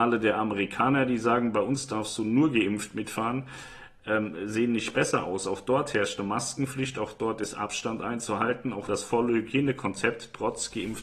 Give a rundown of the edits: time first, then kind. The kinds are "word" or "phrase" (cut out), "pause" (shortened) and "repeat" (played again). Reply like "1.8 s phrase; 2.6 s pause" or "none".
8.9 s phrase